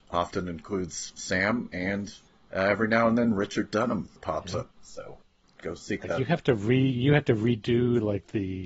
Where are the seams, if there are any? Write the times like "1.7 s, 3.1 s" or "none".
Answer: 4.2 s, 4.7 s